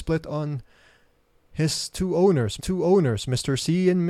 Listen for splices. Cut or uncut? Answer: cut